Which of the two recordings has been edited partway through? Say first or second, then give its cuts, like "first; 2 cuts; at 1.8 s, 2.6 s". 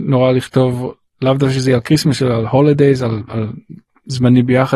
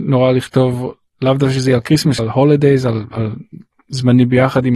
second; 1 cut; at 2.2 s